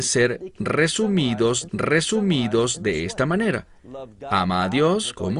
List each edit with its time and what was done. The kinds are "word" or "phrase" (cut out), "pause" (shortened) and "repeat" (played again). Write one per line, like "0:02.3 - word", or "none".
0:01.7 - repeat